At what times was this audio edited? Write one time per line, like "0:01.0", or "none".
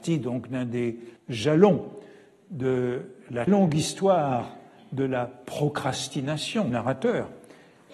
0:01.2
0:03.5
0:06.7